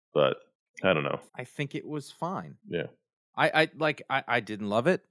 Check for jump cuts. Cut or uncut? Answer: cut